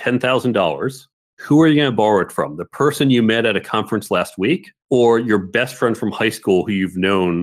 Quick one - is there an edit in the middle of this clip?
yes; 2 cuts; at 1.1 s, 4.8 s

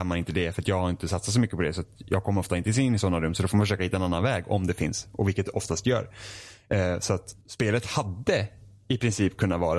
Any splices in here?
yes; 1 cut; at 7.4 s

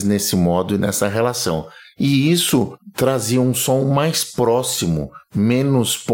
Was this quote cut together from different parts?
no; 0 cuts

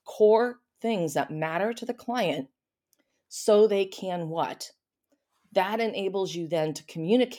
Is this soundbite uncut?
yes; 0 cuts

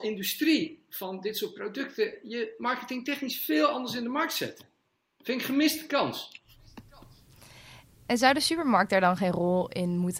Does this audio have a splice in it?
no; 0 cuts

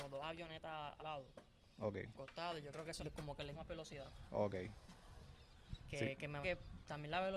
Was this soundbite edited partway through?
yes; 5 cuts; at 1.0 s, 2.1 s, 3.0 s, 3.5 s, 6.4 s

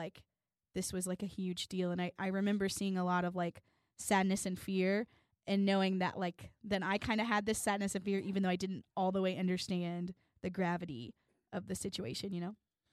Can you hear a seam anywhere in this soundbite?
no; 0 cuts

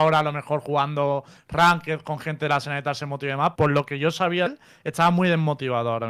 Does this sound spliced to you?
yes; 2 cuts; at 3.5 s, 4.5 s

